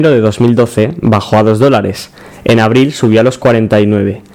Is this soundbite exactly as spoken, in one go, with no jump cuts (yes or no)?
yes